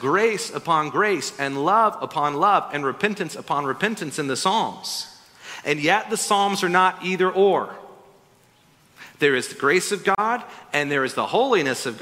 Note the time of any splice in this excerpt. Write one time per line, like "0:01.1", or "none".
none